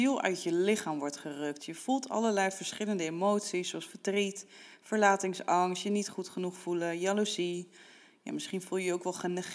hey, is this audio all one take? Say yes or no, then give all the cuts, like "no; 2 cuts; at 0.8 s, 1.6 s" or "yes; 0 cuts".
yes; 0 cuts